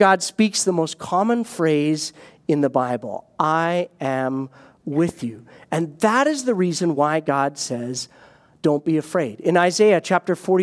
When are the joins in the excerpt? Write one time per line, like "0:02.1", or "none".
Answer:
none